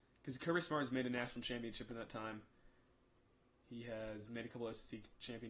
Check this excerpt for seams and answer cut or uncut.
uncut